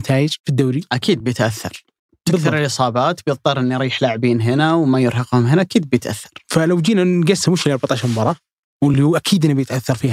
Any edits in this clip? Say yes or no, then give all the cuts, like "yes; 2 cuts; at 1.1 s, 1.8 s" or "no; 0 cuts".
no; 0 cuts